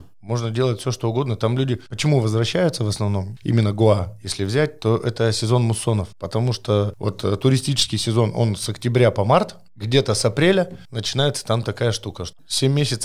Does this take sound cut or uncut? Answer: cut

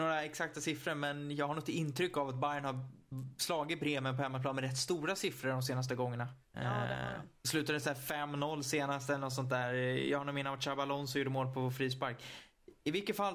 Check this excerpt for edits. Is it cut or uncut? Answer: cut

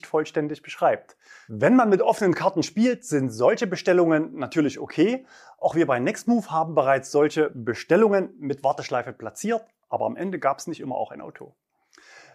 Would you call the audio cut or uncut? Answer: uncut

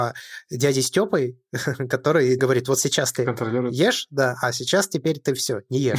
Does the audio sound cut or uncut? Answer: cut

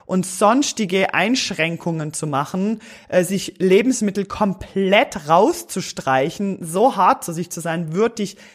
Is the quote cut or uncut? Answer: uncut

